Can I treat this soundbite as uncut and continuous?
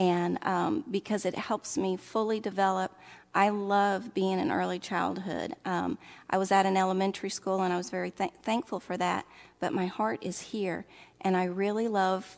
yes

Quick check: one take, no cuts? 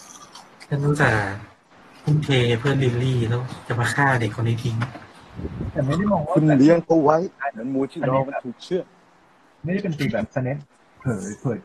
yes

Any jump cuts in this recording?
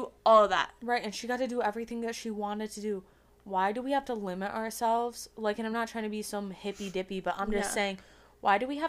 no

